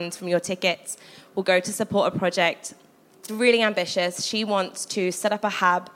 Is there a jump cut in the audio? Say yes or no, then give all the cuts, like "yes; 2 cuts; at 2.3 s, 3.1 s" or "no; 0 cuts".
yes; 1 cut; at 3.3 s